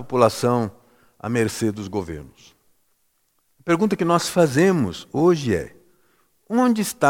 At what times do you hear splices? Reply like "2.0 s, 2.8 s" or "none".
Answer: none